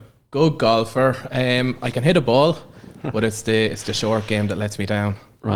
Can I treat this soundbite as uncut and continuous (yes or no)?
yes